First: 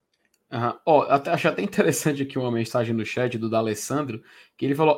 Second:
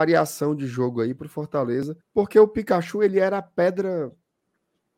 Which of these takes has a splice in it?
second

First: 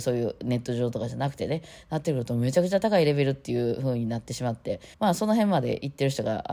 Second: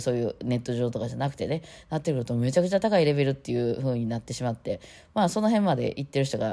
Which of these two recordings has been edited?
first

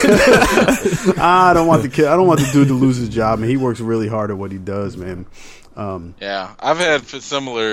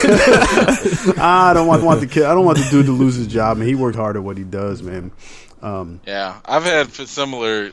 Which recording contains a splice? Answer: second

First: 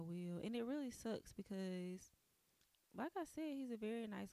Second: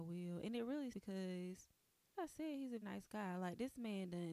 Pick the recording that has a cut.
second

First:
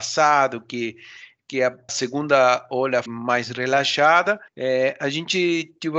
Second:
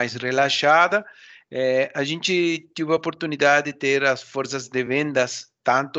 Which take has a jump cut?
first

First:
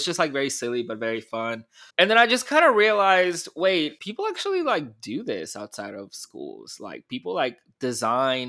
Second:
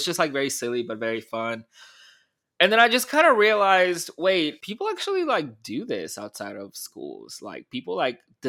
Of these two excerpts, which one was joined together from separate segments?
first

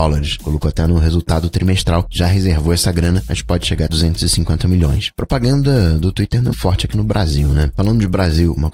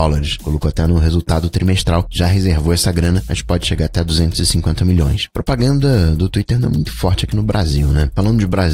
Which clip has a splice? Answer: first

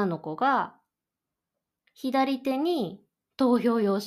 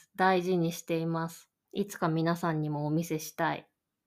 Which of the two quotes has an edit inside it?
second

